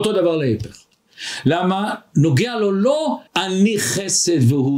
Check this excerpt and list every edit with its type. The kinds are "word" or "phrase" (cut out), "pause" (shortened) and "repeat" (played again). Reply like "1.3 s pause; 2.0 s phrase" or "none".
3.3 s pause